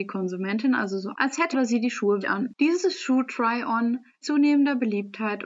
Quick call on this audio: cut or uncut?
cut